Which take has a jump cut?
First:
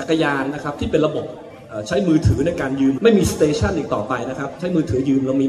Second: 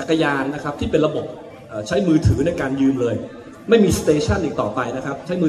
first; 1 cut; at 3.0 s

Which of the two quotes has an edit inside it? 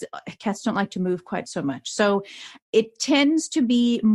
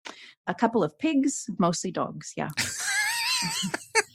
second; 1 cut; at 1.6 s

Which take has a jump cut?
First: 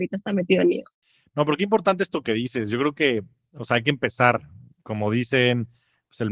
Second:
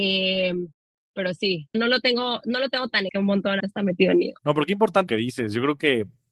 second; 5 cuts; at 1.7 s, 3.1 s, 3.6 s, 4.4 s, 5.1 s

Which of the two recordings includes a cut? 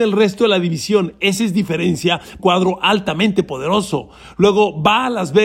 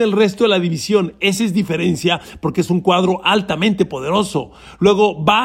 first; 1 cut; at 2.4 s

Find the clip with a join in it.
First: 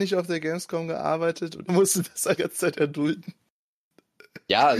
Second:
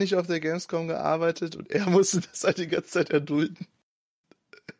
first; 2 cuts; at 1.7 s, 2.4 s

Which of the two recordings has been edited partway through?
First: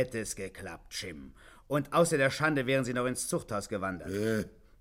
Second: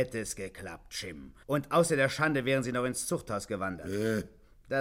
second; 1 cut; at 1.4 s

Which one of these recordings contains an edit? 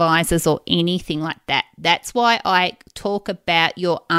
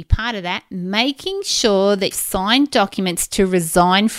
second; 1 cut; at 2.1 s

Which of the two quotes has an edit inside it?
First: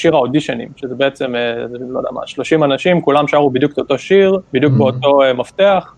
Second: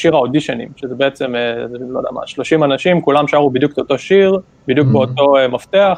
first; 1 cut; at 4.5 s

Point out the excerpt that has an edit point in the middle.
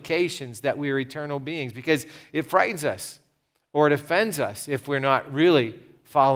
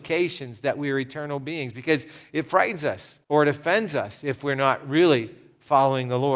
second; 1 cut; at 3.2 s

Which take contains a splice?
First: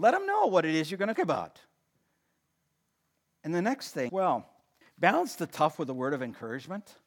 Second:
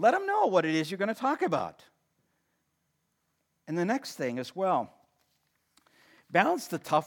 first; 3 cuts; at 1.1 s, 4.1 s, 4.8 s

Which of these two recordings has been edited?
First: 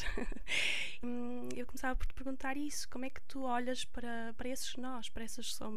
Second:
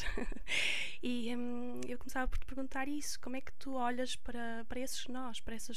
first; 1 cut; at 1.0 s

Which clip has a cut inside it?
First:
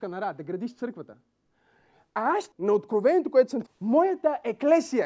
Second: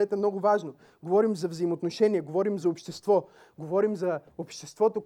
first; 2 cuts; at 2.5 s, 3.7 s

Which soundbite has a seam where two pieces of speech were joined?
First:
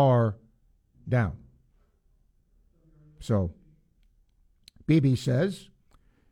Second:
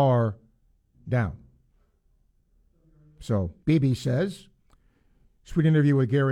second; 1 cut; at 3.6 s

